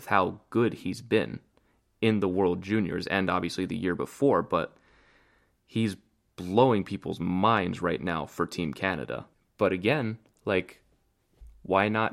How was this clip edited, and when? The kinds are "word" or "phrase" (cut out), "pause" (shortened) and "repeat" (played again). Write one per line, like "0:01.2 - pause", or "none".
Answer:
none